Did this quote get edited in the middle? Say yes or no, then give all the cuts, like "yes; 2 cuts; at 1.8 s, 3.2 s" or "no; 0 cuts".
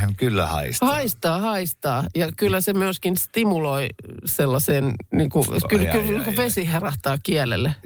no; 0 cuts